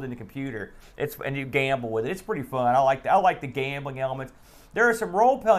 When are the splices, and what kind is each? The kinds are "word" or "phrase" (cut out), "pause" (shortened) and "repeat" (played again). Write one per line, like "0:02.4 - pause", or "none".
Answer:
none